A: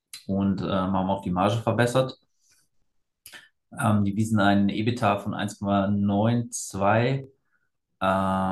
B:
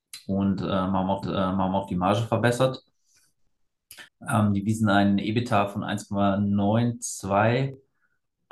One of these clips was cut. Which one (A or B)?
B